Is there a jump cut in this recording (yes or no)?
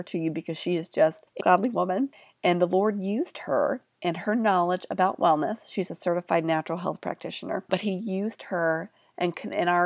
yes